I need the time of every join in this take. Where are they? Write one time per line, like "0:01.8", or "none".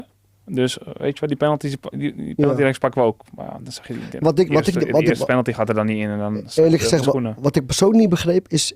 0:01.9
0:07.0

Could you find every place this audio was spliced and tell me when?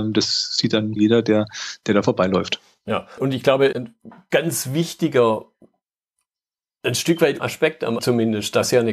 0:01.0
0:03.2
0:03.7
0:07.4
0:08.0

